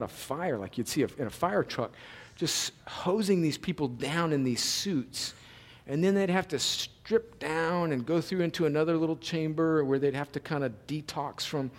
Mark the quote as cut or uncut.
uncut